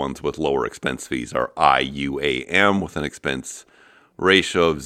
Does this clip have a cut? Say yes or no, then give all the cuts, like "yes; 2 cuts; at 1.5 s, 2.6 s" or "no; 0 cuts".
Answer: no; 0 cuts